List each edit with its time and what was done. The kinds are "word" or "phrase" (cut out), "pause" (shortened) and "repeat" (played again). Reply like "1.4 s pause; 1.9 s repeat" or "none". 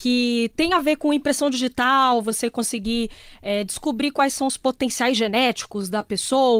none